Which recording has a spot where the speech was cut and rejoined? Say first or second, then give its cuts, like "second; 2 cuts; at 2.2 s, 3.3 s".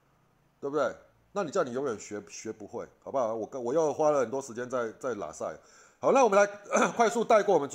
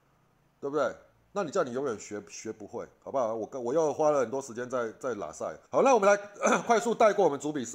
second; 1 cut; at 5.7 s